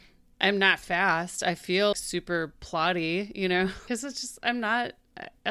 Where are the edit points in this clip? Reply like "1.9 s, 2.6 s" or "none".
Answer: 1.9 s, 3.9 s

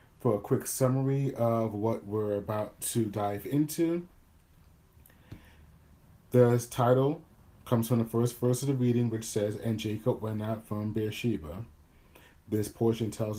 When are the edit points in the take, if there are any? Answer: none

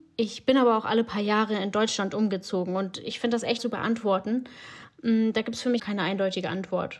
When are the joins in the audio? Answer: 3.6 s, 5.8 s

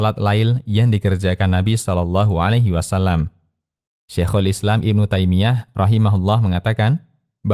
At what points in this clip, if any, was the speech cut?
none

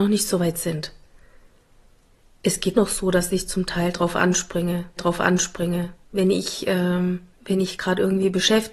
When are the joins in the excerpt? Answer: 2.7 s, 5.0 s, 7.3 s

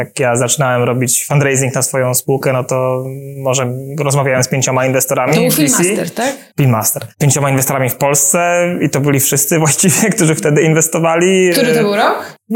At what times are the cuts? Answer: 7.1 s

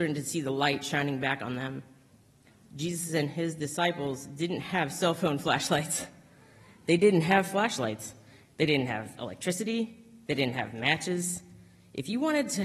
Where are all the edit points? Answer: none

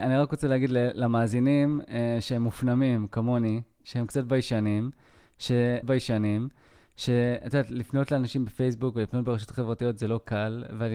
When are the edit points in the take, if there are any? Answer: 5.8 s

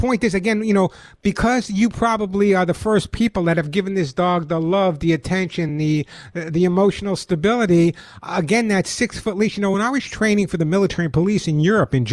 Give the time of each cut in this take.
none

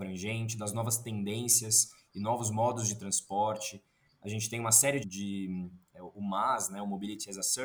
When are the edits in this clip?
5.0 s

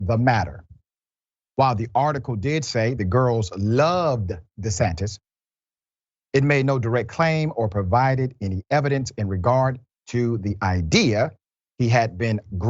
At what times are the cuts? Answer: 3.0 s

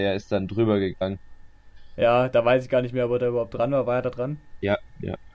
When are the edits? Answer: none

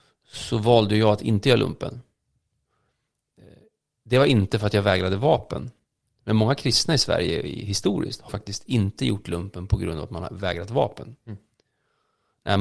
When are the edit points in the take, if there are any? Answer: 8.3 s

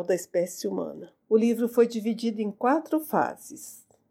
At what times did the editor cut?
1.2 s

